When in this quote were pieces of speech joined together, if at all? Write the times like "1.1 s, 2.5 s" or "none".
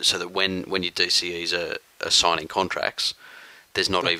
none